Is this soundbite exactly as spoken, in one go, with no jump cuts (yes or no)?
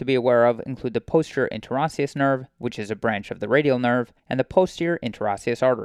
no